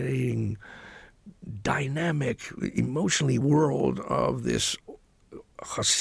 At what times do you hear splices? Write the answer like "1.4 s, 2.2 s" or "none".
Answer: 1.5 s, 3.4 s